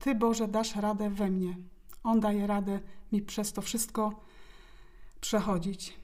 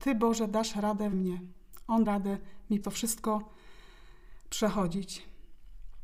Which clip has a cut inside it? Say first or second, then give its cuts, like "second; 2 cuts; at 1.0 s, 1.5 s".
second; 3 cuts; at 1.1 s, 2.0 s, 2.8 s